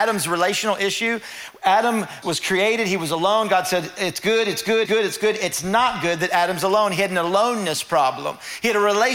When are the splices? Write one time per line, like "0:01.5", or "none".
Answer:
0:02.2
0:04.9